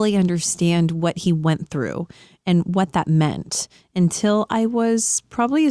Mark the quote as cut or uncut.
uncut